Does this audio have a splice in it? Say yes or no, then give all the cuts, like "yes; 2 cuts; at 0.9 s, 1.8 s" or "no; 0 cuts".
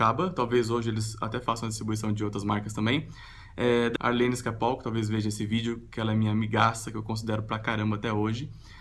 yes; 1 cut; at 4.0 s